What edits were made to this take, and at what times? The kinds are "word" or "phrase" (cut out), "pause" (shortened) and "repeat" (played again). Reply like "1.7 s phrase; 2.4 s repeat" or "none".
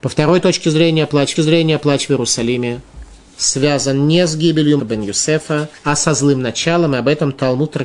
1.3 s repeat; 4.8 s word; 5.8 s pause